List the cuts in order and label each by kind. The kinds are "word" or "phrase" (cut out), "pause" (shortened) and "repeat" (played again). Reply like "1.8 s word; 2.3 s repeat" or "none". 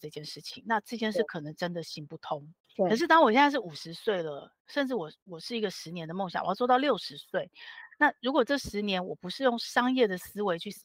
2.6 s pause